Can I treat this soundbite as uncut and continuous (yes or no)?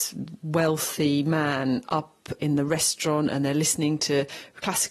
yes